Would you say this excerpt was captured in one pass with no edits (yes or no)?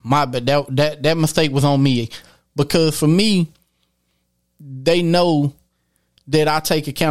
yes